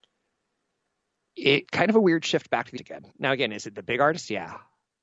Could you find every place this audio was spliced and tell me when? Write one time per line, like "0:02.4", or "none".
0:01.6
0:02.8
0:03.1